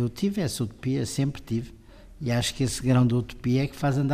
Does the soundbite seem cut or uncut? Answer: uncut